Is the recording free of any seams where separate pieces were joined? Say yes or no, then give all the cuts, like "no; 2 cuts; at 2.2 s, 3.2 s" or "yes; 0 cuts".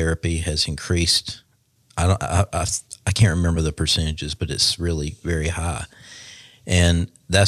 yes; 0 cuts